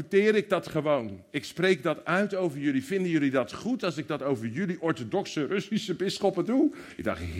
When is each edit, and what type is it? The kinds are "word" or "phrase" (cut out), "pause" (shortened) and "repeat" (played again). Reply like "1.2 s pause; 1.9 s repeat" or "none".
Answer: none